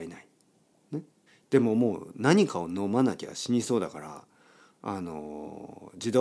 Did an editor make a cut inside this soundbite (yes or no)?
yes